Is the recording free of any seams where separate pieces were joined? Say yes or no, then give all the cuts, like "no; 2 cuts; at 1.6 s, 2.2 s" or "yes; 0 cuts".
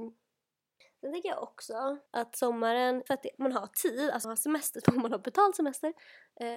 no; 4 cuts; at 2.1 s, 3.1 s, 4.2 s, 4.8 s